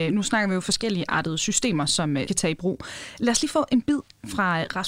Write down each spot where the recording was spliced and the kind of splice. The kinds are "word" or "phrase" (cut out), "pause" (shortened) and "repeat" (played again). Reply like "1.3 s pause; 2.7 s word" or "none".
2.3 s phrase